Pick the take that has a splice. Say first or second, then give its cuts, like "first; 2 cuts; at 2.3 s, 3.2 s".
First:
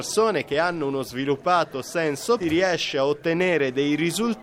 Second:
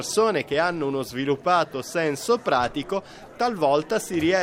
first; 1 cut; at 2.4 s